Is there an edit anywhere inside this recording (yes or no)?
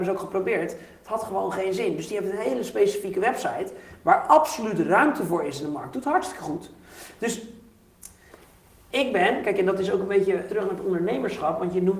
yes